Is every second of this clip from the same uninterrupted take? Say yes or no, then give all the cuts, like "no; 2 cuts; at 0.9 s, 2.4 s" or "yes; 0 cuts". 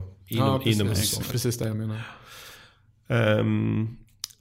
no; 1 cut; at 1.3 s